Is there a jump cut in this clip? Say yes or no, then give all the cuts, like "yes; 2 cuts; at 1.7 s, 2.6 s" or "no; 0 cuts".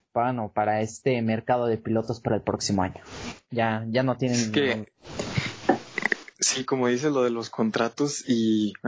no; 0 cuts